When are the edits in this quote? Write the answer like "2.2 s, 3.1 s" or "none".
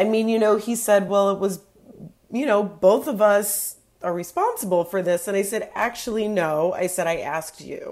none